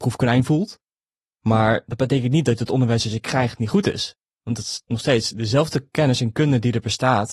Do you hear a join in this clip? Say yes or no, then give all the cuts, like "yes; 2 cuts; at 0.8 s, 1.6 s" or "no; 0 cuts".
no; 0 cuts